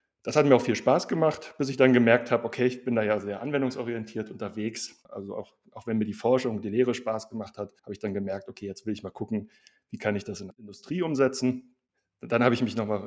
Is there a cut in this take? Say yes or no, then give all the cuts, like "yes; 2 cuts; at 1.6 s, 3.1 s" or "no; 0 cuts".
yes; 1 cut; at 7.8 s